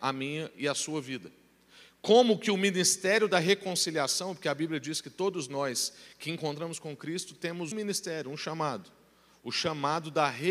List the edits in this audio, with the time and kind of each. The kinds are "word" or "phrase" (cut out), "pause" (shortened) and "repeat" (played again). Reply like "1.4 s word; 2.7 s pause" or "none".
7.7 s word